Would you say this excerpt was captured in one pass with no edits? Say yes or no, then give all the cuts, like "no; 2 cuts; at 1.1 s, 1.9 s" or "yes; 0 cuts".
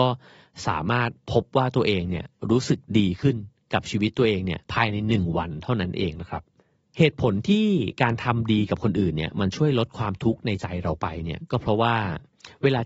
no; 2 cuts; at 4.6 s, 6.6 s